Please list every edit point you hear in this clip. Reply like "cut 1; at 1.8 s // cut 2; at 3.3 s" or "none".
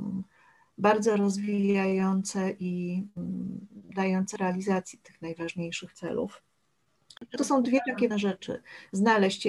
cut 1; at 4.4 s // cut 2; at 7.4 s // cut 3; at 8.1 s